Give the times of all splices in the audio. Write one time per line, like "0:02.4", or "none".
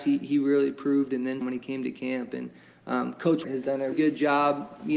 0:01.4
0:03.4
0:03.9